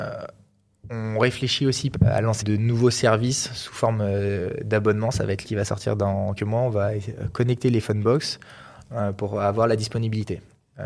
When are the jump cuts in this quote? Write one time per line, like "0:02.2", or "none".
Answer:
0:01.9
0:02.4
0:05.4
0:06.4